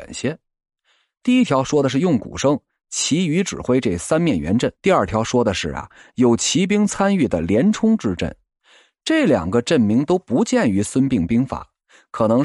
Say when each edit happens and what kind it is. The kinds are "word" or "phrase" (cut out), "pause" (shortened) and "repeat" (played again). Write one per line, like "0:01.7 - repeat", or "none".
0:04.7 - pause